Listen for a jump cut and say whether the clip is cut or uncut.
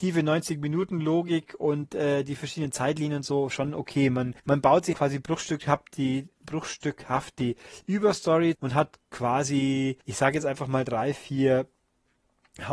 cut